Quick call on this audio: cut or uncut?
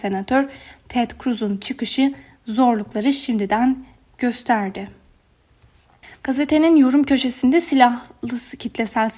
uncut